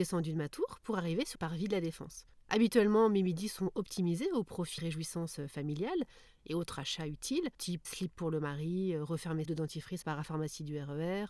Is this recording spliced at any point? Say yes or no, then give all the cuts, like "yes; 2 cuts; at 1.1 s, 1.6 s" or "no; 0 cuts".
yes; 5 cuts; at 1.3 s, 4.8 s, 7.8 s, 9.4 s, 10.0 s